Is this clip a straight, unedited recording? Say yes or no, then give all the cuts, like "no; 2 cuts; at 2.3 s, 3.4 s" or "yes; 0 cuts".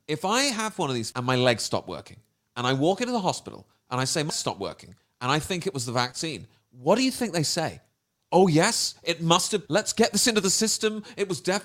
no; 3 cuts; at 1.1 s, 4.3 s, 9.7 s